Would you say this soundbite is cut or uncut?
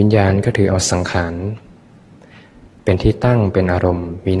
uncut